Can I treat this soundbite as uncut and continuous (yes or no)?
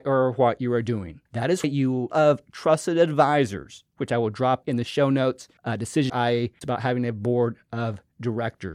no